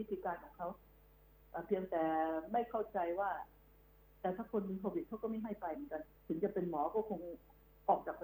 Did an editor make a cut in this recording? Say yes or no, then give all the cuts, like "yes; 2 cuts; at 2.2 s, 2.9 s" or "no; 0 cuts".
yes; 1 cut; at 6.2 s